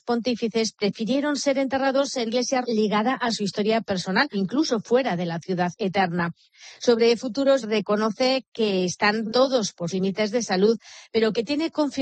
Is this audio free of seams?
no; 6 cuts; at 2.3 s, 2.6 s, 4.3 s, 7.6 s, 9.3 s, 9.9 s

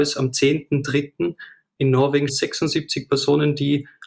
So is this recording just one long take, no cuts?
no; 1 cut; at 2.3 s

